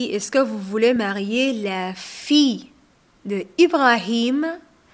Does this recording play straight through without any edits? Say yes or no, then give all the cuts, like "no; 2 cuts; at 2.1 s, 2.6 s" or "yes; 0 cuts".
yes; 0 cuts